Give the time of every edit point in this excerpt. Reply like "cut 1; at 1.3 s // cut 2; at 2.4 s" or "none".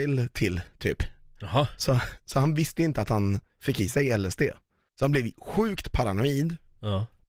none